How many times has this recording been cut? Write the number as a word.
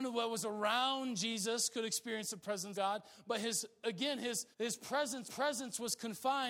three